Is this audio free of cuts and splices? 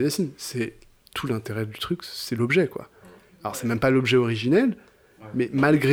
yes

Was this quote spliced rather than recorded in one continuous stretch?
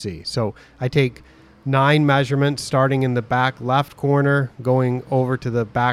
no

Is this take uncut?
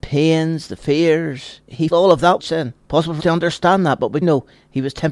no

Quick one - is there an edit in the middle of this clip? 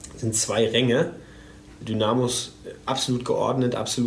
yes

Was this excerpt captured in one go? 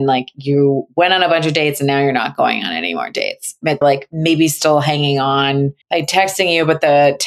no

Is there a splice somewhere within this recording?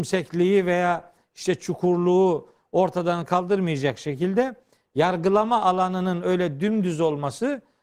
no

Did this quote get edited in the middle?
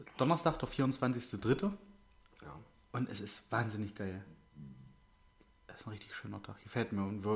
no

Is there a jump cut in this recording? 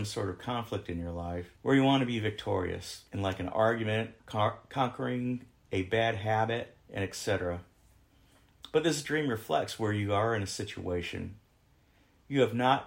yes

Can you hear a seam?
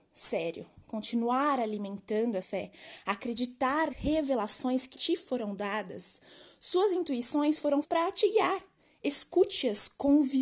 yes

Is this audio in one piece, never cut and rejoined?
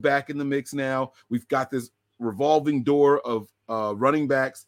yes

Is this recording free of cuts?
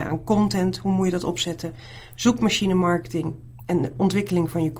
yes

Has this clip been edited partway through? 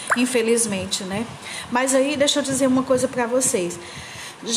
no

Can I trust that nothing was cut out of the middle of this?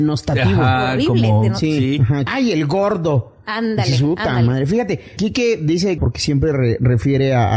no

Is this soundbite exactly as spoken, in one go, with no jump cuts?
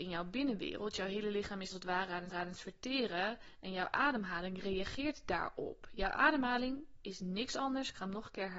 no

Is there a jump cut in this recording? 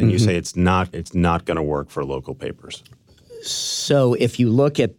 yes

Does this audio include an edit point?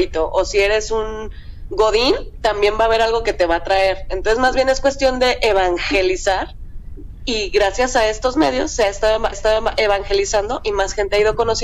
yes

